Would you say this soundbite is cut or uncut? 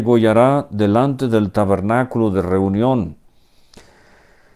uncut